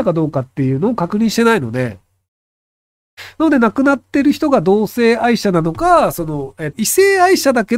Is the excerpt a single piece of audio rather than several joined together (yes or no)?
no